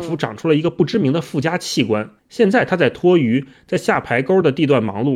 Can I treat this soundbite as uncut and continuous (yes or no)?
no